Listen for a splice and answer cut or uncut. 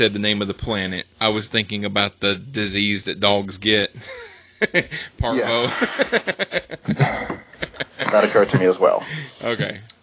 cut